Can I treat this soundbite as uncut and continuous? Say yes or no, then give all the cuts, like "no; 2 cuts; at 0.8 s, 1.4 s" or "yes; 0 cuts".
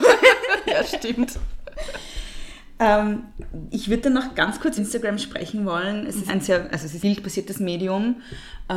no; 3 cuts; at 4.8 s, 6.3 s, 7.0 s